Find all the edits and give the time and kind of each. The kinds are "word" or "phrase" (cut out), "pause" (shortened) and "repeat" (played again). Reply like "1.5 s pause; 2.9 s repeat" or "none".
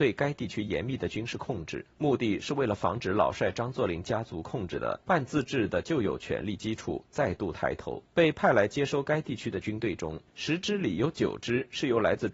1.9 s pause; 5.0 s pause; 8.1 s pause; 10.3 s pause

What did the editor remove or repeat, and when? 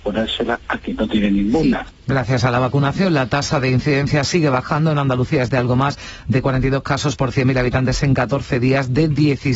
2.0 s pause

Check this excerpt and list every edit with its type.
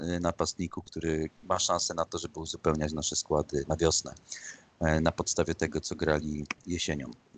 1.3 s word; 3.6 s word

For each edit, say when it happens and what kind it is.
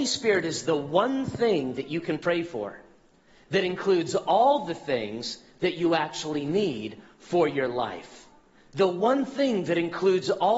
none

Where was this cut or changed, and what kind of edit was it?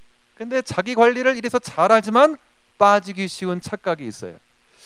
none

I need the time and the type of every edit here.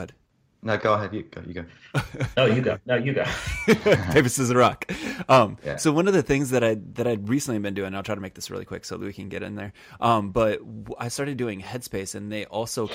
none

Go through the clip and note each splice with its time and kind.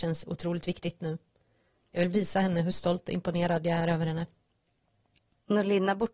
none

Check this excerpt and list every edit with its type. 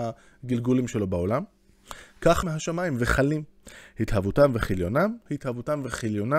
2.4 s word; 5.3 s phrase

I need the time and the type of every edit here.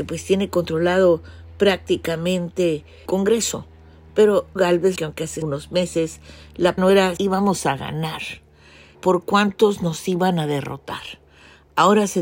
3.1 s word; 4.6 s word; 5.0 s word; 5.4 s word; 6.8 s word; 7.2 s word; 8.9 s word

